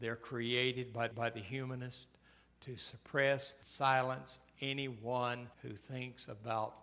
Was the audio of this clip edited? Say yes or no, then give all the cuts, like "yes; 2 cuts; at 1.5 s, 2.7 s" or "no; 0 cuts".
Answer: yes; 3 cuts; at 1.1 s, 3.6 s, 5.5 s